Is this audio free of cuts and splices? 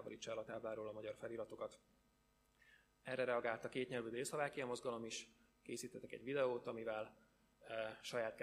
yes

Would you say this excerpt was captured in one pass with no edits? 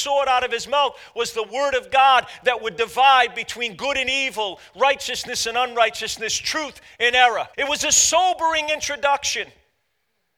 no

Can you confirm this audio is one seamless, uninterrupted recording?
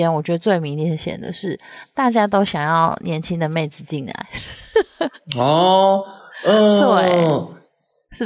no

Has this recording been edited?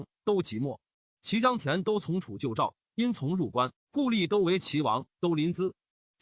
no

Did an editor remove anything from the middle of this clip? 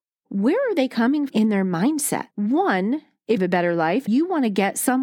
yes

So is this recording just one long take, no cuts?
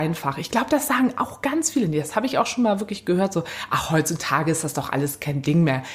yes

